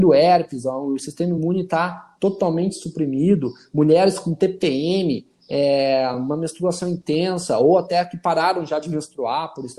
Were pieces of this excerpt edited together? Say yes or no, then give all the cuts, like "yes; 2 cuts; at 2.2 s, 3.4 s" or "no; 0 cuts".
no; 0 cuts